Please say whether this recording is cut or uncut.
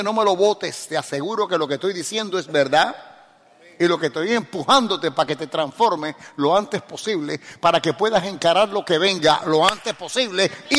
uncut